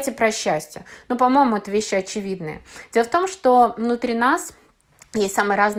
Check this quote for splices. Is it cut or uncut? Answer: uncut